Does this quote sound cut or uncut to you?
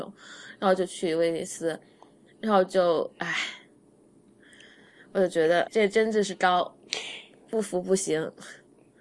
cut